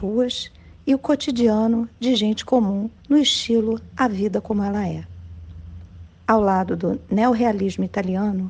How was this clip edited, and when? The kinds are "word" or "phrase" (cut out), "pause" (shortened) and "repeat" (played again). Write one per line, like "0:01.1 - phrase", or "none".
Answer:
0:03.0 - pause
0:06.1 - pause